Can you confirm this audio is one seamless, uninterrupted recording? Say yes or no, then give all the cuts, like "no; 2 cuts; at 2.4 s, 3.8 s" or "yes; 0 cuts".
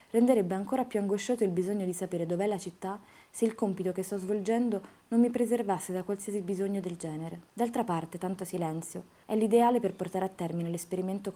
no; 1 cut; at 9.2 s